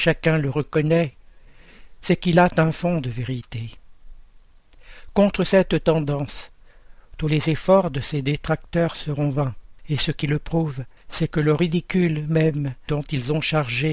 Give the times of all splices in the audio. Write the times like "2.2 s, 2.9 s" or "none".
9.8 s, 11.0 s